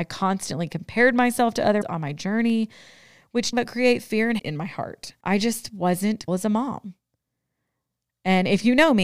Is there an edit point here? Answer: yes; 5 cuts; at 1.8 s, 3.5 s, 4.4 s, 5.2 s, 6.3 s

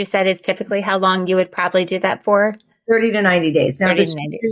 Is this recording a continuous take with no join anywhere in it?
yes; 0 cuts

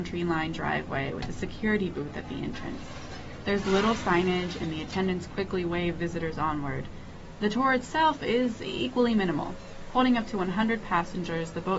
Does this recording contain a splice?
no; 0 cuts

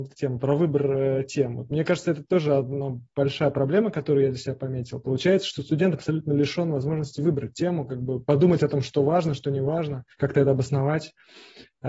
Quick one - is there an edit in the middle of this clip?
yes; 1 cut; at 10.1 s

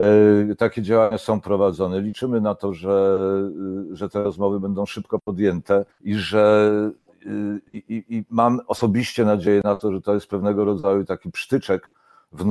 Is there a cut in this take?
yes; 2 cuts; at 5.9 s, 7.7 s

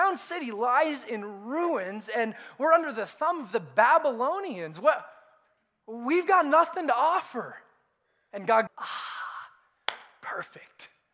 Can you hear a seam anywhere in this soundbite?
yes; 1 cut; at 8.7 s

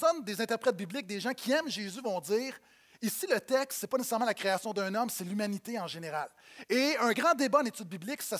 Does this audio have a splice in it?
no; 0 cuts

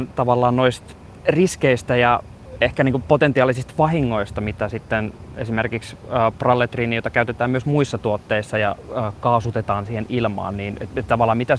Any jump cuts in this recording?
no; 0 cuts

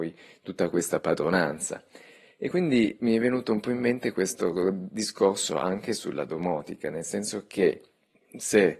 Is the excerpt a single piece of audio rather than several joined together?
yes; 0 cuts

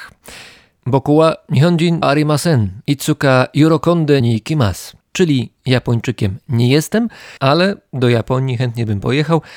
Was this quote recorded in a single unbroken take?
no; 4 cuts; at 2.0 s, 4.2 s, 5.0 s, 7.4 s

